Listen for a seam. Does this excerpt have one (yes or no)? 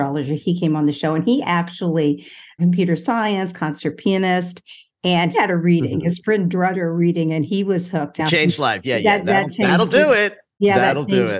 yes